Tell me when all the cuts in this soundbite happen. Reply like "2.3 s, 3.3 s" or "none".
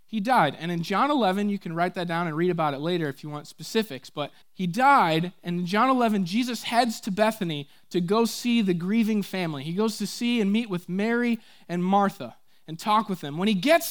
4.4 s